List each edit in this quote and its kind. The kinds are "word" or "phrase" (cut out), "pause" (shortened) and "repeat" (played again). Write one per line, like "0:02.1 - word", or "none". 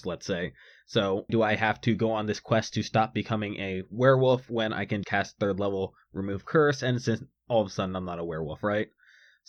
0:01.3 - word
0:05.0 - word